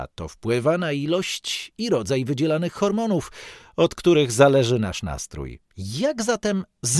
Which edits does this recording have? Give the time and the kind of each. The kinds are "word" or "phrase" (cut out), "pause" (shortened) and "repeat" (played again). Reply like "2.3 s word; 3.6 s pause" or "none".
5.7 s pause